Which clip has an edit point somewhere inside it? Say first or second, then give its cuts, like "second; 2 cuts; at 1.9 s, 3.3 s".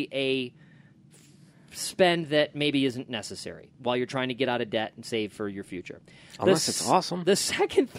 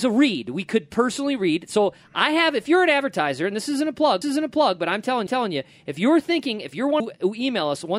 second; 3 cuts; at 4.2 s, 5.3 s, 7.0 s